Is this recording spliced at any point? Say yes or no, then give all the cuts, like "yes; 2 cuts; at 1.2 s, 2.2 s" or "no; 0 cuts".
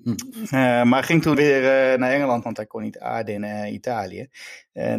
yes; 2 cuts; at 1.3 s, 2.4 s